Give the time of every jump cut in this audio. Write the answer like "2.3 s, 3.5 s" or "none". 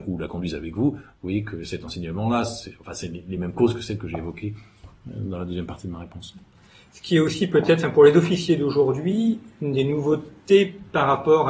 none

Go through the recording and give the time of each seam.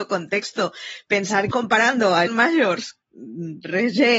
1.5 s, 2.3 s, 3.0 s

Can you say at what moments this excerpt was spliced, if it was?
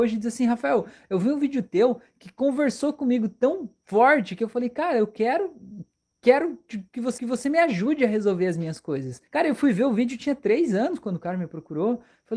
7.2 s, 9.3 s

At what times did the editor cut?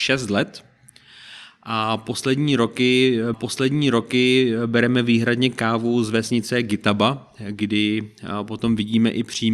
3.3 s

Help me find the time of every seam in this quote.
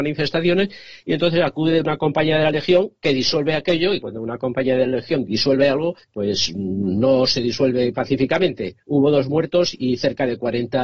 4.0 s, 6.0 s, 8.8 s

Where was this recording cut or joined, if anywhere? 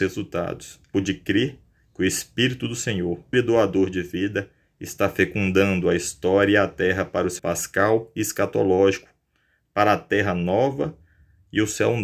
0.9 s, 3.3 s, 7.4 s

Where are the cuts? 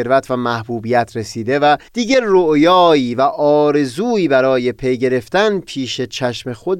1.9 s

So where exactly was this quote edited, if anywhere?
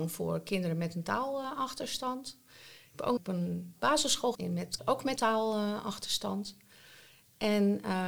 3.2 s, 4.3 s, 4.8 s, 5.2 s

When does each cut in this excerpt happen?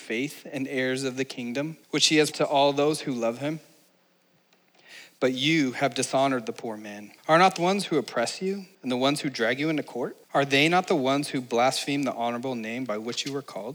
1.8 s, 2.3 s, 7.2 s, 7.6 s, 8.7 s, 10.2 s

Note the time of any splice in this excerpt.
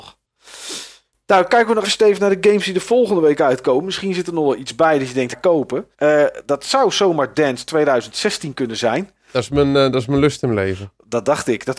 1.8 s, 5.3 s, 5.9 s, 7.3 s

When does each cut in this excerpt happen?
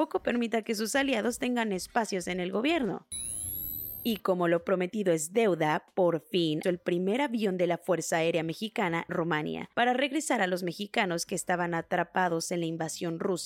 6.6 s, 9.1 s

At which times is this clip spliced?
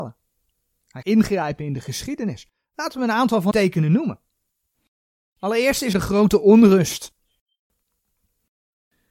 1.0 s, 3.5 s, 5.9 s

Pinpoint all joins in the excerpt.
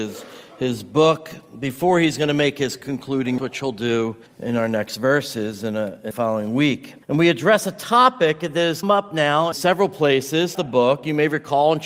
3.4 s, 4.3 s, 6.1 s, 7.0 s, 8.8 s, 9.5 s, 10.5 s

